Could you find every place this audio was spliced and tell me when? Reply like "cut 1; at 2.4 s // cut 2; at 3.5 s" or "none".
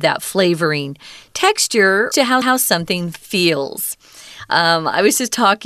cut 1; at 2.1 s // cut 2; at 2.4 s

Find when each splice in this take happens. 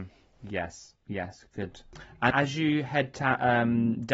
cut 1; at 2.3 s

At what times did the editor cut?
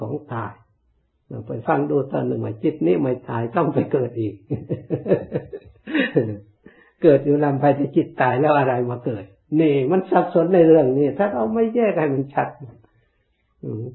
none

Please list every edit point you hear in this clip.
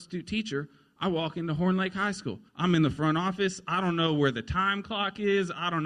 cut 1; at 2.5 s

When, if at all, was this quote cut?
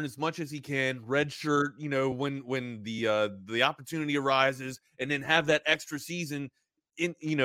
none

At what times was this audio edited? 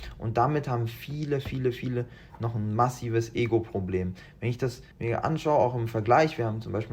cut 1; at 4.9 s

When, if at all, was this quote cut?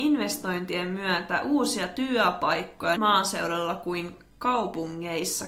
cut 1; at 3.0 s

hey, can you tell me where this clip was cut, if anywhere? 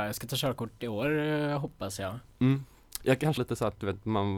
cut 1; at 3.4 s

